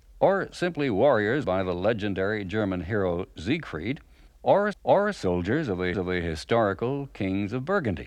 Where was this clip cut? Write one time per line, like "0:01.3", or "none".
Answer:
0:01.4
0:04.7
0:05.9